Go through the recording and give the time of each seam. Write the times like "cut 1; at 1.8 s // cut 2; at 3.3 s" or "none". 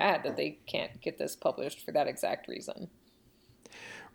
none